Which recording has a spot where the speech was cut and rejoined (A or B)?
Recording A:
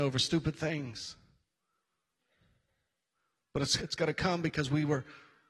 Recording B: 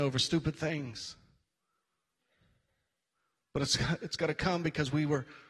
A